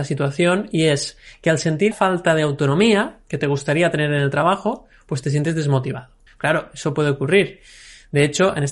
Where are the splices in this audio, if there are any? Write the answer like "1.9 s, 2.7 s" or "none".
1.9 s, 6.3 s